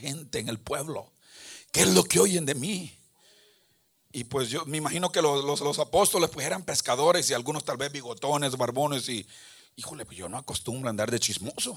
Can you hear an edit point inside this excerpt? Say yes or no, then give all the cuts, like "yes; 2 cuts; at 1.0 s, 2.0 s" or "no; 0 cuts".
yes; 2 cuts; at 5.6 s, 10.1 s